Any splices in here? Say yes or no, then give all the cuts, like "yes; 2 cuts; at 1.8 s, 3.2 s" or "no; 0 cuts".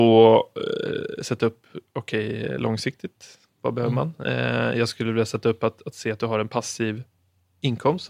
no; 0 cuts